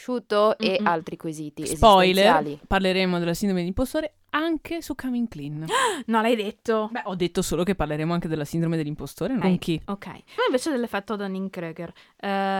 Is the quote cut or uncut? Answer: cut